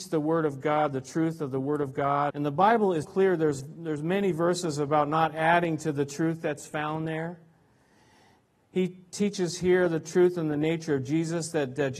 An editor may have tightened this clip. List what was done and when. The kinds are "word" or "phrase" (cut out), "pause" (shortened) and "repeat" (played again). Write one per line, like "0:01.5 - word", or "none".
0:02.3 - word
0:03.0 - word